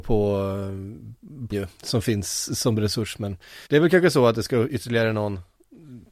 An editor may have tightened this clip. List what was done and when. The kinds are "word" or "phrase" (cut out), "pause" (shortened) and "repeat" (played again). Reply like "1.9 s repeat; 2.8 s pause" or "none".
1.5 s word; 3.7 s pause